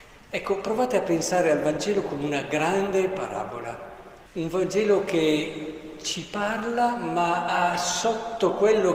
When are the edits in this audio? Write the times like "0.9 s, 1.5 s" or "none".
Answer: 4.2 s